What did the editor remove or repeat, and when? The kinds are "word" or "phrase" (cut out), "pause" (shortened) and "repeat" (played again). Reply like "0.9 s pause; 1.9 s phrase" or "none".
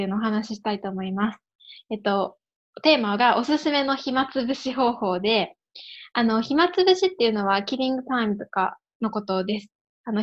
none